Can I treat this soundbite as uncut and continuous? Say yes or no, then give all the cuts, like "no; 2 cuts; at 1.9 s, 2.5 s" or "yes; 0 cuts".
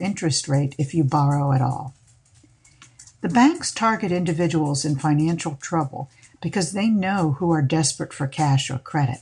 yes; 0 cuts